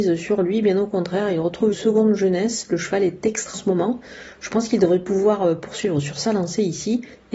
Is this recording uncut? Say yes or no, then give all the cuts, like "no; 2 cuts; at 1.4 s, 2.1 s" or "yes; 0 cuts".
no; 2 cuts; at 1.7 s, 3.5 s